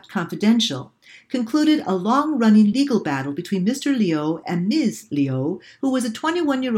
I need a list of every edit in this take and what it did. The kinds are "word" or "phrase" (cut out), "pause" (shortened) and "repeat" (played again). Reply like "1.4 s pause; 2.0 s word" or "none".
none